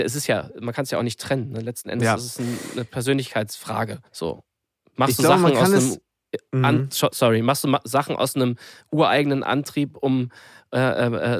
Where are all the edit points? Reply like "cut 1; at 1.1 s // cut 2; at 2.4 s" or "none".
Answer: cut 1; at 4.1 s

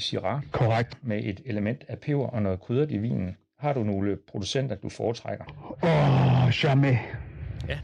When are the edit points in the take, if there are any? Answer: none

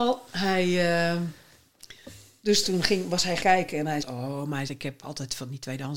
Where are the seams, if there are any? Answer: cut 1; at 2.6 s // cut 2; at 3.4 s // cut 3; at 4.0 s // cut 4; at 4.7 s // cut 5; at 5.0 s

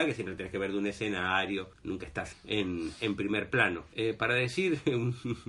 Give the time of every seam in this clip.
cut 1; at 2.3 s

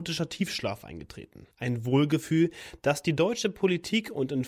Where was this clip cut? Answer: cut 1; at 1.5 s

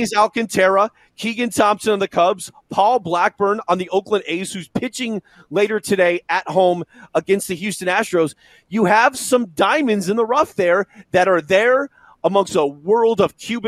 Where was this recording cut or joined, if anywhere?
none

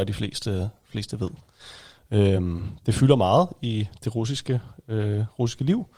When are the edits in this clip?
none

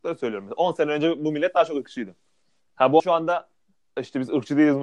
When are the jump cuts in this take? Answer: cut 1; at 3.0 s

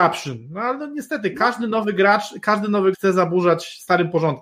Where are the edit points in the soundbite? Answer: cut 1; at 2.9 s

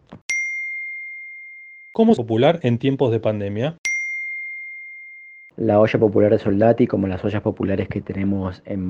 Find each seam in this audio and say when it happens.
cut 1; at 2.2 s

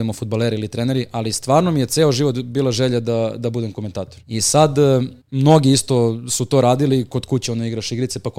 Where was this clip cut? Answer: cut 1; at 4.2 s // cut 2; at 5.2 s

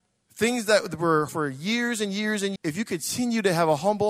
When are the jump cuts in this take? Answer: cut 1; at 1.3 s // cut 2; at 2.6 s

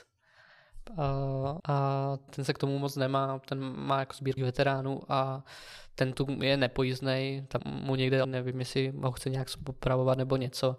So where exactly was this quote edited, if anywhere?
cut 1; at 1.6 s // cut 2; at 2.3 s // cut 3; at 4.4 s // cut 4; at 6.1 s // cut 5; at 7.6 s // cut 6; at 8.2 s

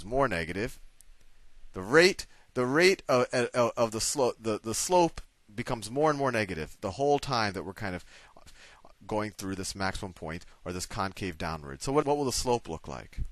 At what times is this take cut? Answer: cut 1; at 8.5 s // cut 2; at 12.0 s

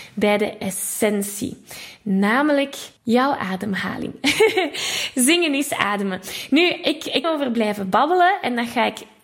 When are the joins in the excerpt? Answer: cut 1; at 3.0 s // cut 2; at 7.2 s

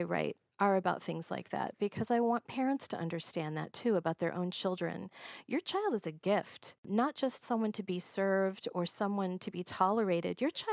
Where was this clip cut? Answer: none

